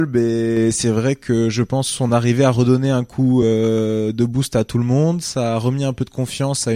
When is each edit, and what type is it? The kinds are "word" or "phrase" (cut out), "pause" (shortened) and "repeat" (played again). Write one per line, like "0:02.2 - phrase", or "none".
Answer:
none